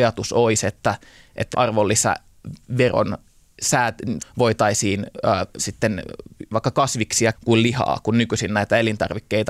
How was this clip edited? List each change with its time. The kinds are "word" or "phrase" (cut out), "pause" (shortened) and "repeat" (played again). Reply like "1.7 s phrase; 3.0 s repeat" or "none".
1.5 s word; 4.2 s word; 5.6 s word; 6.5 s word; 7.3 s word